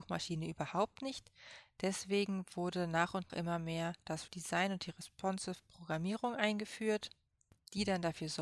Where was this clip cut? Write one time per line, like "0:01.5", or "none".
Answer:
0:03.3
0:04.3